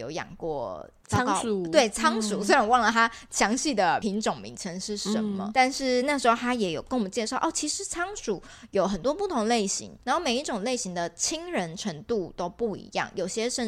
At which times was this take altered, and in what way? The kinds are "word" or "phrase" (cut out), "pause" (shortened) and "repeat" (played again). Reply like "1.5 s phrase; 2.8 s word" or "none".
5.5 s word; 10.0 s pause